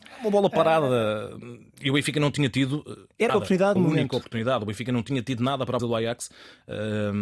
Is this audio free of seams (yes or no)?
no